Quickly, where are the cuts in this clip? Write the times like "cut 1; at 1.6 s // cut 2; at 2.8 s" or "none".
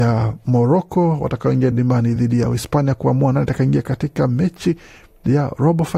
none

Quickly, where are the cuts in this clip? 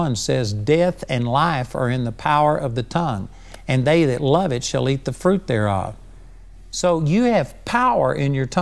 none

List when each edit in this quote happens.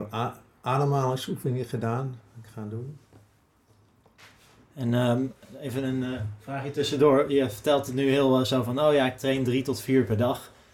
none

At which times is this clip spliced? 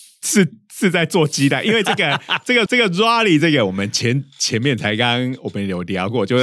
cut 1; at 2.7 s

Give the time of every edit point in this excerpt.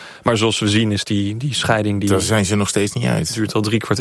none

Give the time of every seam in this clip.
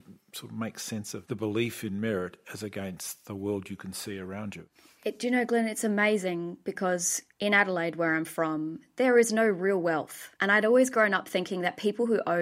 cut 1; at 10.4 s

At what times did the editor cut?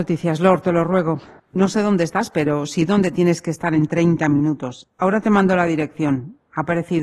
cut 1; at 1.4 s

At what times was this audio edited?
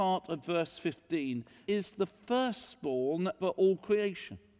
cut 1; at 1.7 s // cut 2; at 3.4 s

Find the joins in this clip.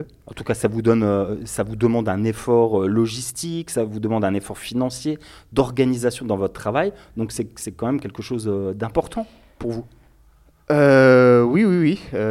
none

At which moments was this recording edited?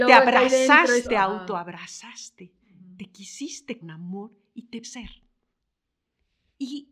cut 1; at 1.0 s // cut 2; at 3.8 s // cut 3; at 4.8 s

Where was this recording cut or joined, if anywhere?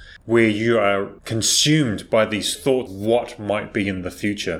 cut 1; at 1.2 s // cut 2; at 2.9 s

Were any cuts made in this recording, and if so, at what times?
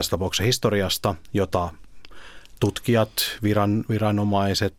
none

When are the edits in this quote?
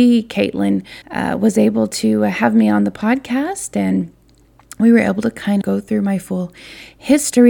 cut 1; at 1.0 s // cut 2; at 5.6 s

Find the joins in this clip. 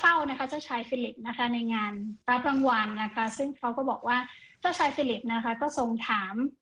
none

